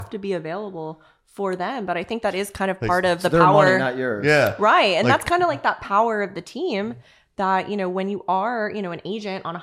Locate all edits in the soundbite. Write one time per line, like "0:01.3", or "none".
none